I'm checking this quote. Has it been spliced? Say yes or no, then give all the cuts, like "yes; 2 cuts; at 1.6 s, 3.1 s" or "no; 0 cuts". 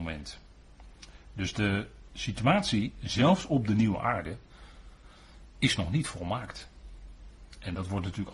no; 0 cuts